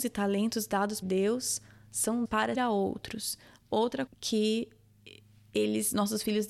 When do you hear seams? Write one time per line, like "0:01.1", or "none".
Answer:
0:01.0
0:02.2
0:02.5
0:04.1